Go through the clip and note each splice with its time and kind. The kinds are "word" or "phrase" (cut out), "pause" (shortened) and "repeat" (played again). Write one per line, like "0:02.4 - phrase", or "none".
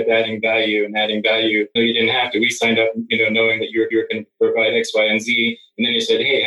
0:01.8 - word
0:03.9 - repeat

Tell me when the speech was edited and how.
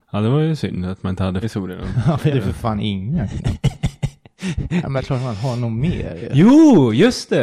0:01.4 - word
0:02.3 - word
0:05.0 - word

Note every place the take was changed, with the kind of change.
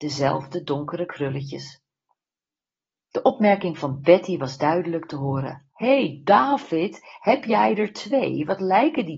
0:05.7 - pause

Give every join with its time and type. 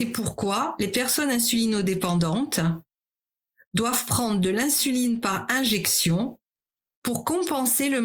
none

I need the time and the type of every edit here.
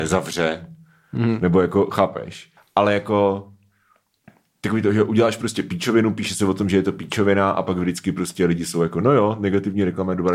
0:02.6 - pause

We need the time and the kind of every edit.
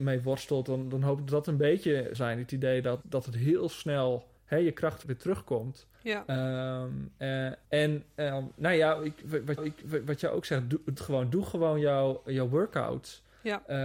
0:02.1 - phrase
0:03.0 - word
0:04.4 - pause
0:05.0 - word
0:05.9 - pause
0:07.6 - pause
0:09.6 - repeat
0:11.0 - phrase

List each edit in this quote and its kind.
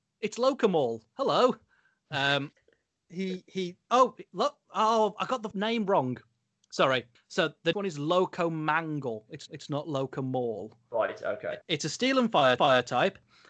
0:02.6 - pause
0:05.5 - word
0:07.2 - pause
0:07.7 - phrase
0:09.5 - repeat
0:11.6 - pause
0:12.6 - repeat

